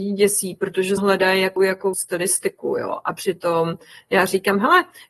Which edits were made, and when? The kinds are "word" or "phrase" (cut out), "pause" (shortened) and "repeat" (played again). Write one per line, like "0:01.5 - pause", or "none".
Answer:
0:01.0 - word
0:01.6 - word
0:01.9 - word